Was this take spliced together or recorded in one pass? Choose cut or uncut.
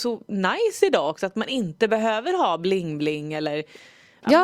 uncut